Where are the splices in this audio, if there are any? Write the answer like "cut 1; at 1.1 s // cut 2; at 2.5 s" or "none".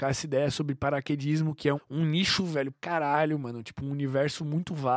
cut 1; at 1.8 s // cut 2; at 2.4 s // cut 3; at 2.7 s

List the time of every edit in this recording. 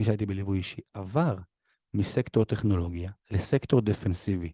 cut 1; at 3.2 s

